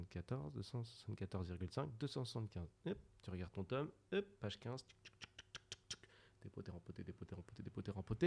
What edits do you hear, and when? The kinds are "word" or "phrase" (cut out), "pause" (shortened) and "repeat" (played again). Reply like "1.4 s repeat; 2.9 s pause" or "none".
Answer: none